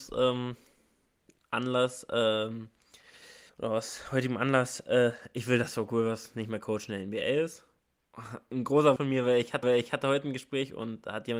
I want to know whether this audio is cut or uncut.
cut